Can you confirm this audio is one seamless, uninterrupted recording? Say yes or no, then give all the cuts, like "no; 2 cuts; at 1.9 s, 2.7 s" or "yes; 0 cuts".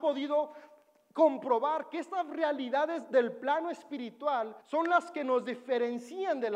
no; 1 cut; at 4.6 s